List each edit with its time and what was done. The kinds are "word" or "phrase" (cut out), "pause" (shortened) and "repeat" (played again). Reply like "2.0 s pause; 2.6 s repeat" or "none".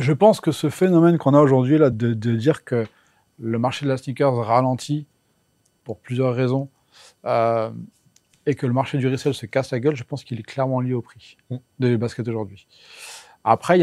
1.9 s word